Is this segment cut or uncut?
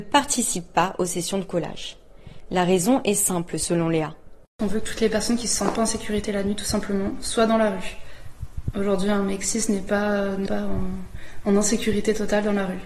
cut